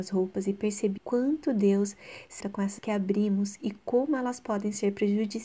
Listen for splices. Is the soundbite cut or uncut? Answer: cut